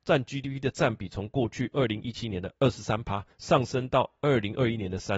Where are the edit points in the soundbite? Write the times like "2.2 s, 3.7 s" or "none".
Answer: 3.3 s